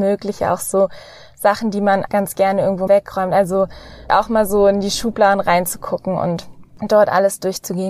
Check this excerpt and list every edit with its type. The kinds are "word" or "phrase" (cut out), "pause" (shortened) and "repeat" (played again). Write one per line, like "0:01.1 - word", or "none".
0:02.1 - word
0:02.9 - word
0:04.1 - word